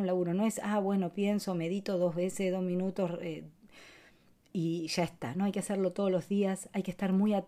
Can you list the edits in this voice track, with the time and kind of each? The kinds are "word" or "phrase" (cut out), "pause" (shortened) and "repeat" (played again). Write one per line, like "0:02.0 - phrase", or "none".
none